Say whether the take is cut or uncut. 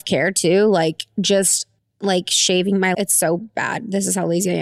cut